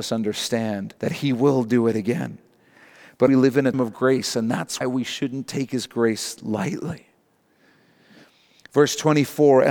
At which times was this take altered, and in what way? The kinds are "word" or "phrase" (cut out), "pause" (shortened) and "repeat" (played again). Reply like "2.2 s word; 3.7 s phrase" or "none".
1.0 s pause; 3.3 s phrase; 3.7 s word; 4.8 s word

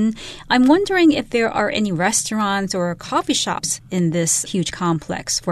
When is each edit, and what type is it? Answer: none

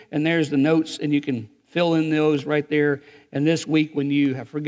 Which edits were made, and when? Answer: none

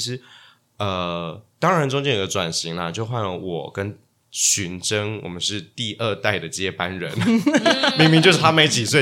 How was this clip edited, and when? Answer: none

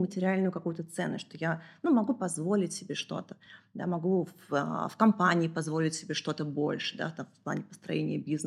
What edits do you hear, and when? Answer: none

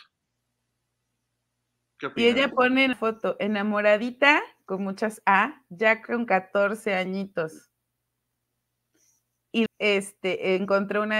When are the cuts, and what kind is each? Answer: 2.9 s word; 9.7 s word

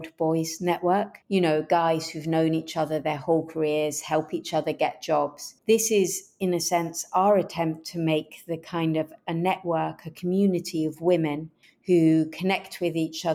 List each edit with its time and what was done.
1.2 s pause; 5.6 s pause; 11.6 s pause

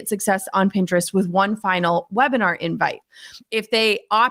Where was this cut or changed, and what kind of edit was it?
none

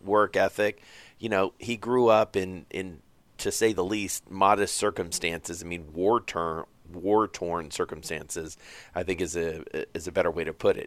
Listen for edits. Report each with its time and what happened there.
none

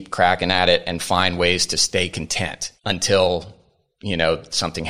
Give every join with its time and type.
2.8 s pause

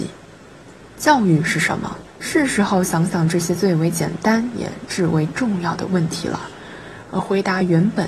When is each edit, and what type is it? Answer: 2.1 s pause

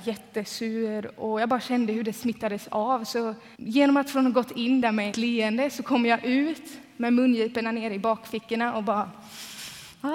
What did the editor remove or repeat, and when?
3.6 s pause; 5.1 s word

